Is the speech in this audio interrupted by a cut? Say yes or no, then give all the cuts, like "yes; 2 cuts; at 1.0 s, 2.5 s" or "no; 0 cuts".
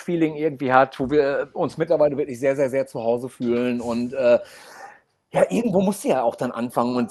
no; 0 cuts